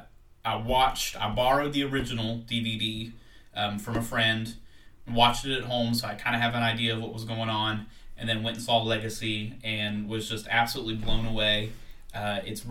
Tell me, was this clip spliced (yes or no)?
no